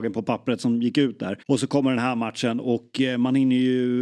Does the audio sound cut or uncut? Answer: cut